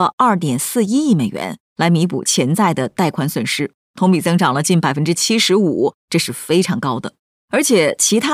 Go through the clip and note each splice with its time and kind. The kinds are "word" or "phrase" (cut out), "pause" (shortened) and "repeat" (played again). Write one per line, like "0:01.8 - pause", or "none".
none